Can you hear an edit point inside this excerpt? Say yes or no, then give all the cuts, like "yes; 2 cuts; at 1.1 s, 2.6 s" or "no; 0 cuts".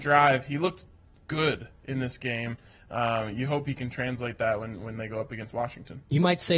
no; 0 cuts